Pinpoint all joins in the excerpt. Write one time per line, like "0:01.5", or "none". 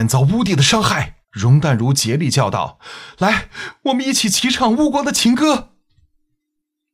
0:01.2